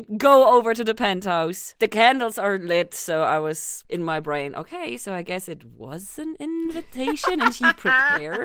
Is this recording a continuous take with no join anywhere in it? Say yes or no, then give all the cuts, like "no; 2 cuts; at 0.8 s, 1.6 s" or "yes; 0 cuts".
yes; 0 cuts